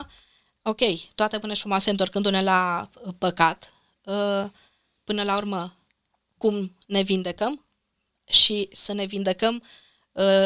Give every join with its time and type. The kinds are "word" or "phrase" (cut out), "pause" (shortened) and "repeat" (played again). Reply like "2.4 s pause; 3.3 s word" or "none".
none